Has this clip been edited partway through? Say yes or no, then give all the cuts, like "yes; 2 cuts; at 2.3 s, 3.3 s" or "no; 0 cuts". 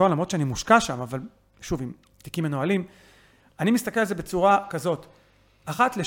no; 0 cuts